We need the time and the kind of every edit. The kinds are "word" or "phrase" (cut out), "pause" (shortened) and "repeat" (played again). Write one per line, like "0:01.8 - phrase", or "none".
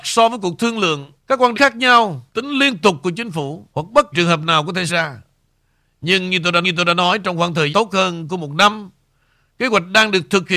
0:01.2 - pause
0:01.5 - word
0:02.3 - pause
0:03.7 - pause
0:04.1 - word
0:04.9 - word
0:06.6 - repeat
0:07.7 - word